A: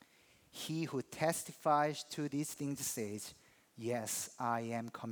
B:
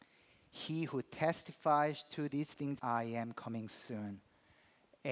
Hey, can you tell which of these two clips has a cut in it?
B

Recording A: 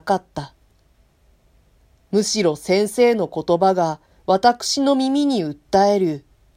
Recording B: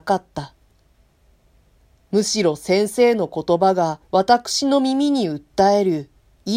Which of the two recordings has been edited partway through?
B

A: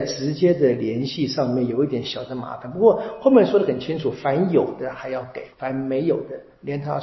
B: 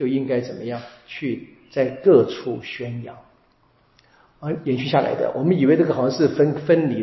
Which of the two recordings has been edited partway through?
A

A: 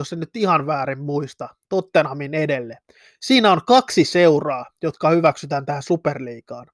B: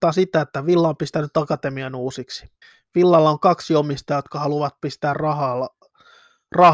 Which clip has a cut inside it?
B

